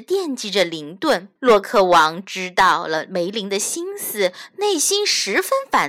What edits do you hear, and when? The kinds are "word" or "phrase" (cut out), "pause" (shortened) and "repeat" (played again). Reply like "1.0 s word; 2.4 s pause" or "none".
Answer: 1.4 s pause